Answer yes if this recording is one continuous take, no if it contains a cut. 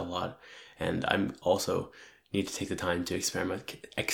yes